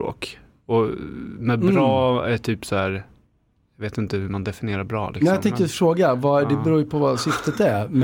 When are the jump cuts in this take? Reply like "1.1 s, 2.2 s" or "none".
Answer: none